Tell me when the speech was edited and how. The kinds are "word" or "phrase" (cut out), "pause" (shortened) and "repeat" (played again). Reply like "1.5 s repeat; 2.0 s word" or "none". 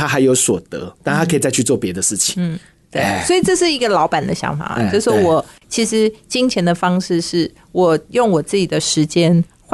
none